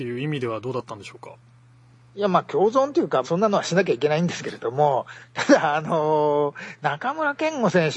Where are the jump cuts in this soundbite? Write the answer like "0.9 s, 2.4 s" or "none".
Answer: 3.2 s